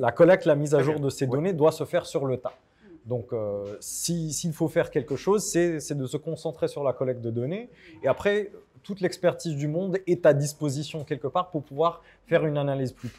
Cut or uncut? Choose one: uncut